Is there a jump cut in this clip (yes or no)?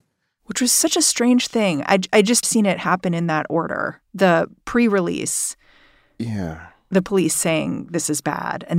yes